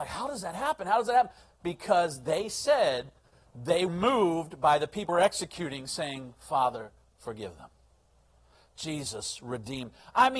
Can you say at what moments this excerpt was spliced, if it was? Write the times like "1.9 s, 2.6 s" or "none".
3.9 s, 5.1 s